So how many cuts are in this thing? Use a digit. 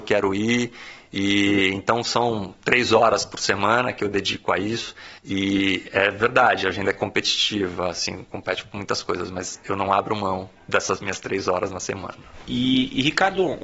1